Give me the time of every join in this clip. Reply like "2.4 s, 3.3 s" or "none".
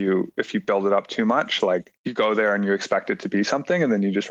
2.0 s